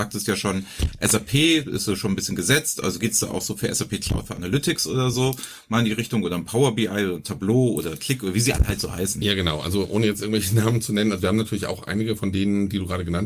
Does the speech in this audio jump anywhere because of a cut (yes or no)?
no